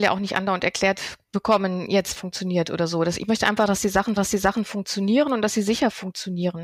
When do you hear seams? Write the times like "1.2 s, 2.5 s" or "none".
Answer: 2.2 s, 4.2 s

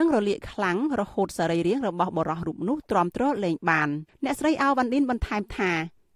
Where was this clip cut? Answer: 4.1 s

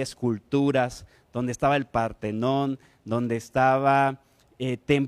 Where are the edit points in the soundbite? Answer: none

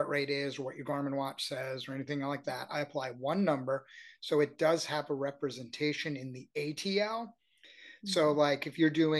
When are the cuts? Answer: none

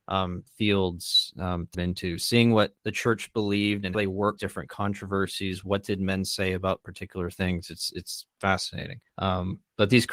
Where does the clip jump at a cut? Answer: 1.7 s, 2.8 s, 3.9 s, 4.4 s, 9.1 s

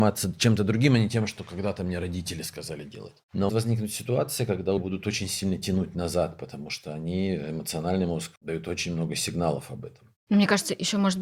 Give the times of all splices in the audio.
3.5 s, 4.8 s, 8.4 s

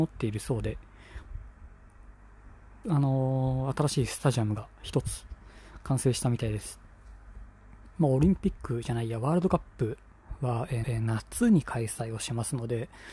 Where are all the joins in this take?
2.8 s, 7.9 s, 10.8 s

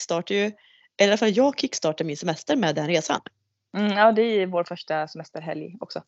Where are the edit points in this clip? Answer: none

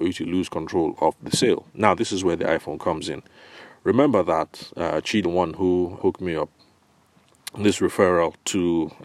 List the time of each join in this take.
1.7 s, 5.2 s, 6.0 s

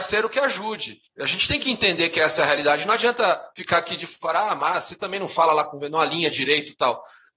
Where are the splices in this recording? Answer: 1.1 s

